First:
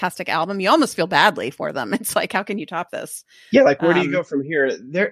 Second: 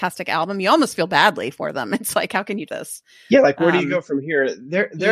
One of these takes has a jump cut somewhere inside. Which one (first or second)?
second